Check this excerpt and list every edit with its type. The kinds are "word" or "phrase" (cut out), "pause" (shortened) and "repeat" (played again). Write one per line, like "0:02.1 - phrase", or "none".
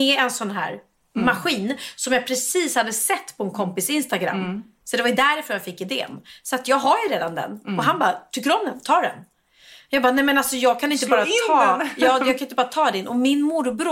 none